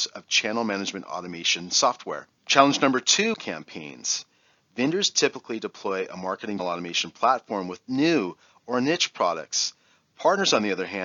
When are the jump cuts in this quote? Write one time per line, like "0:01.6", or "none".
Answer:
0:02.3
0:03.3
0:06.6